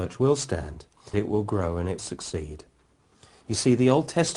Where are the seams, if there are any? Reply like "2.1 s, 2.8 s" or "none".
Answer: 1.1 s, 2.0 s